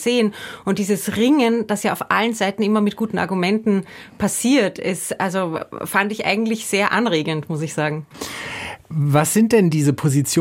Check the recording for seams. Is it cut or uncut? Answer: uncut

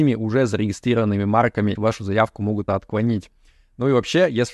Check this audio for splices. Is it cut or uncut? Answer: cut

